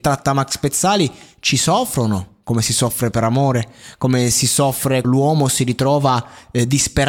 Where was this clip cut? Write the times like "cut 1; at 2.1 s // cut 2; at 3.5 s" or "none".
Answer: cut 1; at 5.0 s